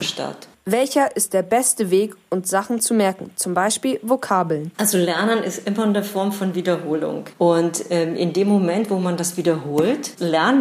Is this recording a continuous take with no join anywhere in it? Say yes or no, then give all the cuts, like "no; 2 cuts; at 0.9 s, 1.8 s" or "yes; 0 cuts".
yes; 0 cuts